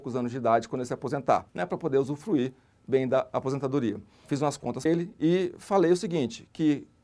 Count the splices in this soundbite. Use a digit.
2